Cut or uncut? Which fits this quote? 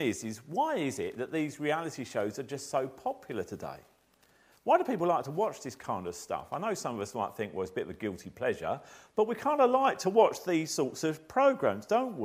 uncut